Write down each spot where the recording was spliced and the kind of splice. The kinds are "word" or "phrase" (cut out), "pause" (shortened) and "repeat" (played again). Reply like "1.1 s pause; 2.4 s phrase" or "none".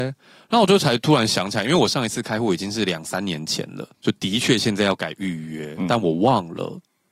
3.9 s pause